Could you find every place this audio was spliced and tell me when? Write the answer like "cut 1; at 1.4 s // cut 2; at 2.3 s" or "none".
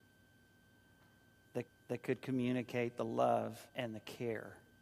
cut 1; at 1.7 s // cut 2; at 3.7 s